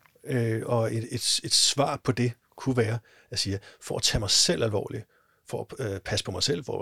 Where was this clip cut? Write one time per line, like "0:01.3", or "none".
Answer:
none